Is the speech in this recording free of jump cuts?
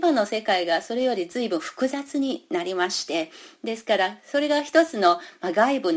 yes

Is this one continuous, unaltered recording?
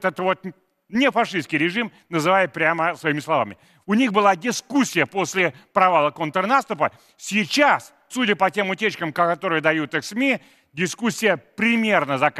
no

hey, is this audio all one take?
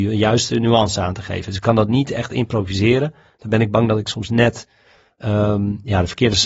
yes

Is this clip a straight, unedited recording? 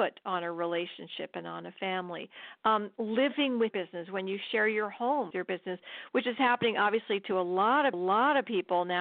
no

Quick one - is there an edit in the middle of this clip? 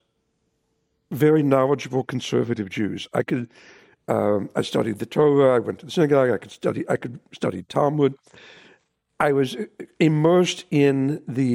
no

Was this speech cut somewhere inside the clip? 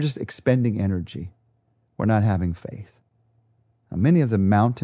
no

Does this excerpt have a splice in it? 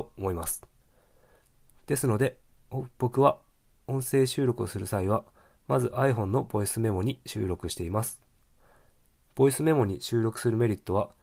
no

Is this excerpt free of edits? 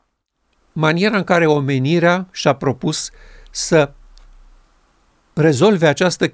yes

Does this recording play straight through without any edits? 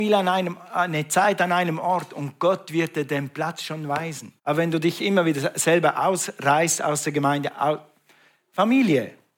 no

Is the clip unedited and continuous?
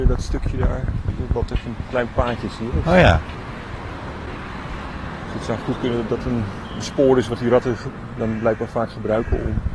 yes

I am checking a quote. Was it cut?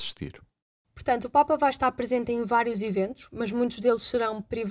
no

